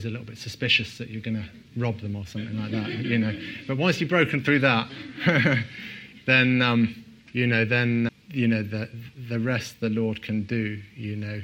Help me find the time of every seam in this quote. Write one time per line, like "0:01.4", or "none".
0:07.2
0:08.1